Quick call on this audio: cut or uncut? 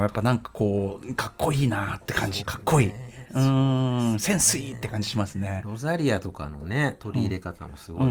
cut